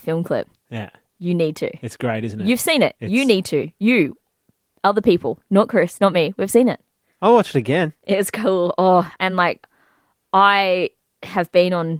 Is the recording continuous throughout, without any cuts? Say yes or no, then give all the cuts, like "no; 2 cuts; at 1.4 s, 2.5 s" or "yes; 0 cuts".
yes; 0 cuts